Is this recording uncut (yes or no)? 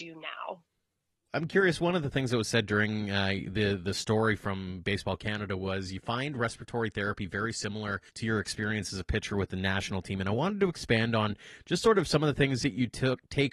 no